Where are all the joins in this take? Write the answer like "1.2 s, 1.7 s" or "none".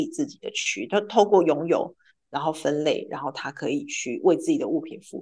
none